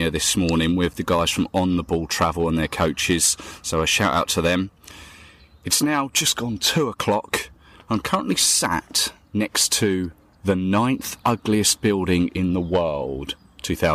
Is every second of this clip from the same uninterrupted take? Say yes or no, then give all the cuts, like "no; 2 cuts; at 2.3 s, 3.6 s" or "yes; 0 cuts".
yes; 0 cuts